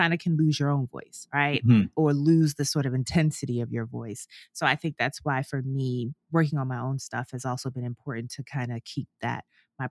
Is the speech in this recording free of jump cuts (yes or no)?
yes